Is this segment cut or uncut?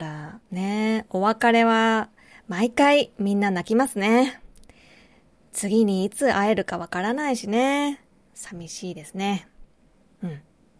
uncut